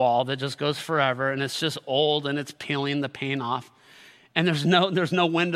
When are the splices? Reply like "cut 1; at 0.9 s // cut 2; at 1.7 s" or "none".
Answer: none